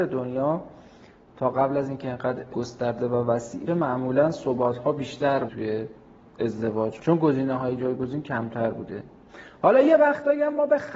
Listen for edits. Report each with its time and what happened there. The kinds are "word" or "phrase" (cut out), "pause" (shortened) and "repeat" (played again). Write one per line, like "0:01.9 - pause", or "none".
0:02.5 - word
0:03.7 - word
0:05.5 - word
0:07.0 - word